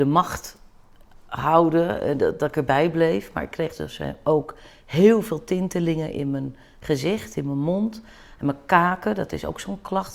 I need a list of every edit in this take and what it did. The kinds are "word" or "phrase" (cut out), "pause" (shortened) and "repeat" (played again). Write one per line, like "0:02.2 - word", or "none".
none